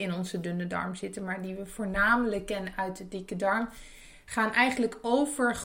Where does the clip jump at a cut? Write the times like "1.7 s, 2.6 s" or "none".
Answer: none